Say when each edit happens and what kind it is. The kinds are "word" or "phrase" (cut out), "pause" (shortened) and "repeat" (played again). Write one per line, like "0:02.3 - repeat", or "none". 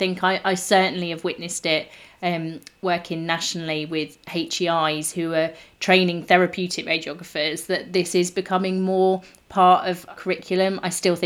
0:10.2 - word